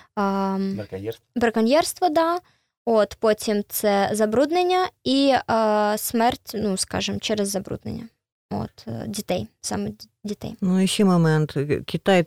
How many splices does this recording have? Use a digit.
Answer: 0